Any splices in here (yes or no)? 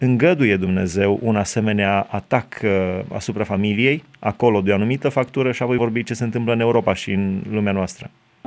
yes